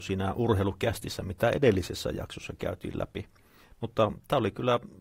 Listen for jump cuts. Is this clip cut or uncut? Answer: uncut